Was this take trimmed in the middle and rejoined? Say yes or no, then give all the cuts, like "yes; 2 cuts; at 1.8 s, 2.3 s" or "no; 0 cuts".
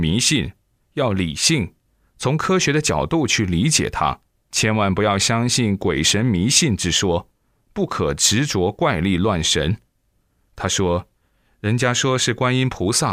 no; 0 cuts